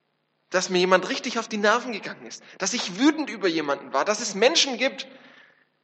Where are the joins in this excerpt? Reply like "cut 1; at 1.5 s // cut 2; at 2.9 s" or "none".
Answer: none